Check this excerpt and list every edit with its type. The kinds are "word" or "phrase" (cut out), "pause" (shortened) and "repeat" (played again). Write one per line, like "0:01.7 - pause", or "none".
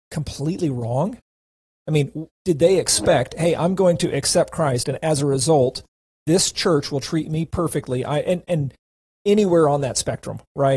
none